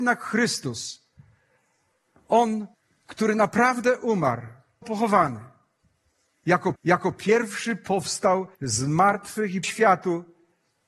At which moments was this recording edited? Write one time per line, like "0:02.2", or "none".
0:02.7
0:04.8
0:06.7
0:08.5
0:09.6